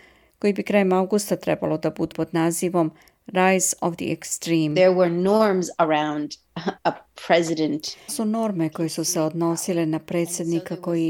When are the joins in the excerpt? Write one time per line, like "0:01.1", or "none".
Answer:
0:02.1
0:06.8
0:08.1